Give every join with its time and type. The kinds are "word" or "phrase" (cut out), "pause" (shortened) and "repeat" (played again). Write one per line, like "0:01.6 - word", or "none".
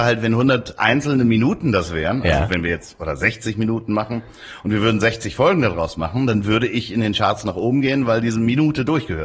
none